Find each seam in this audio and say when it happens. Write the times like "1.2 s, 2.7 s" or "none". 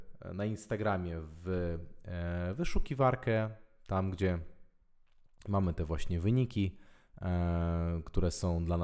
none